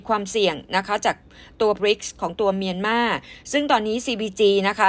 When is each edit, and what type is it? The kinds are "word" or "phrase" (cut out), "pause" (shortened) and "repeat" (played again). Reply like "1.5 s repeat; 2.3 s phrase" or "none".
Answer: 1.8 s word